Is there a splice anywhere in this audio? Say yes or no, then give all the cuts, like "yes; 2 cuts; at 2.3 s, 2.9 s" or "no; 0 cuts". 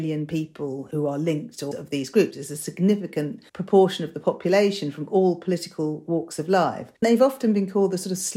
yes; 3 cuts; at 1.7 s, 3.5 s, 7.0 s